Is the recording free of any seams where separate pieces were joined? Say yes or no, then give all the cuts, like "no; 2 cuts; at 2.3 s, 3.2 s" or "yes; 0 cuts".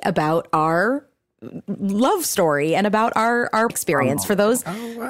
no; 1 cut; at 3.7 s